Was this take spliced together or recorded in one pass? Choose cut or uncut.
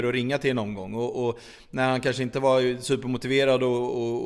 uncut